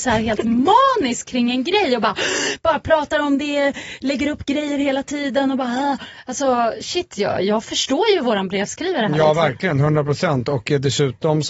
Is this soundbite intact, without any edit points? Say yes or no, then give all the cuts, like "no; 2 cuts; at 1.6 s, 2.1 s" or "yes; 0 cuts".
yes; 0 cuts